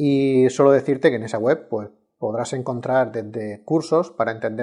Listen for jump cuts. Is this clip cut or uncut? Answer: uncut